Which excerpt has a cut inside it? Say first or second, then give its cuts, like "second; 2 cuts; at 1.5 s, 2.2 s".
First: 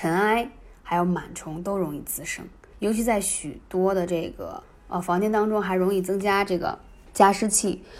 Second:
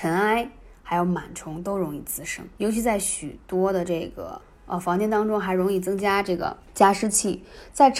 second; 2 cuts; at 2.5 s, 6.6 s